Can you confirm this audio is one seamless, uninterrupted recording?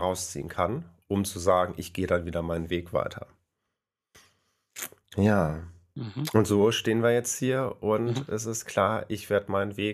yes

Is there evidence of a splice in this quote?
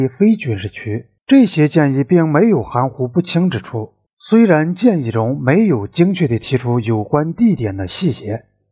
yes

